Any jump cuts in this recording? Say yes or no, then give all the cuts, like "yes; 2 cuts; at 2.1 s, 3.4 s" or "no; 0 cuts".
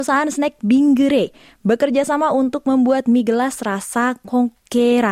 no; 0 cuts